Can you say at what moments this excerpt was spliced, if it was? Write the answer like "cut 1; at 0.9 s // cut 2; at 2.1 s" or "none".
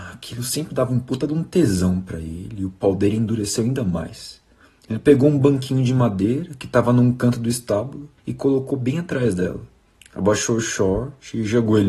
cut 1; at 4.7 s // cut 2; at 8.2 s // cut 3; at 9.9 s